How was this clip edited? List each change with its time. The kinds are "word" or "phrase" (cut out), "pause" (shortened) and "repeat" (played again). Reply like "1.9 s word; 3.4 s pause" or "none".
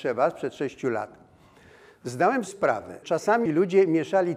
2.5 s word; 3.0 s word; 3.5 s word